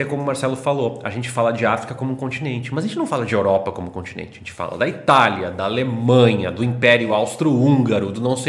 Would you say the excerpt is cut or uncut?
uncut